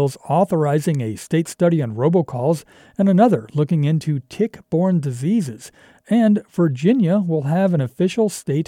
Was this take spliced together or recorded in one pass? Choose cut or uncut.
uncut